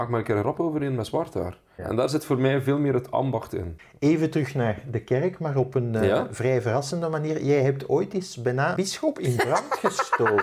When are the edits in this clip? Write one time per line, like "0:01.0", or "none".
0:08.7

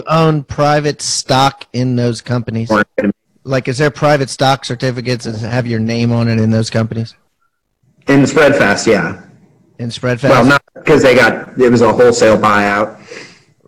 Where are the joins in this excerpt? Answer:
none

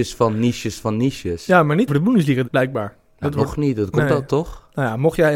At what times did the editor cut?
0:01.9
0:02.4
0:04.3

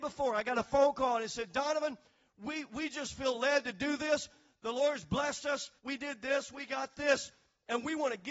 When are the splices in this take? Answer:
0:05.8

